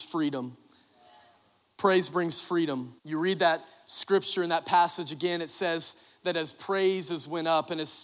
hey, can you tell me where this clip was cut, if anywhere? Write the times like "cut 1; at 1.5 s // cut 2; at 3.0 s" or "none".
cut 1; at 3.0 s